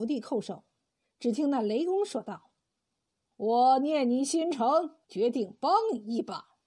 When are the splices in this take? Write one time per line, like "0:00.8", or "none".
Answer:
0:02.6
0:05.0